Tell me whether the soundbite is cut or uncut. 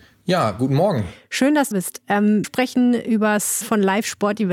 cut